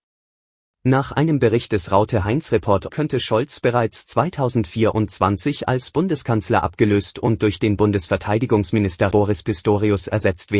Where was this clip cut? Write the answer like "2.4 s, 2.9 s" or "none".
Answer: 2.9 s, 9.1 s

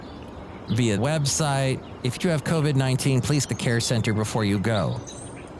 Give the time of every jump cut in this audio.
1.0 s, 2.2 s, 3.5 s

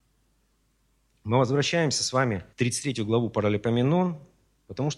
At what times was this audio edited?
2.5 s

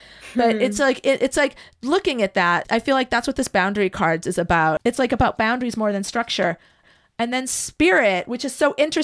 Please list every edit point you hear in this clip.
2.6 s

